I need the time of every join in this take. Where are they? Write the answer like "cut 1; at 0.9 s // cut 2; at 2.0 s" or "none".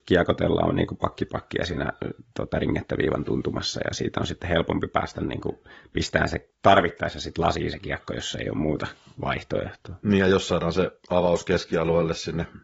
none